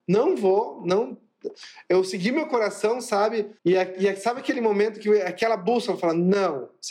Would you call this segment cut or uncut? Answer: cut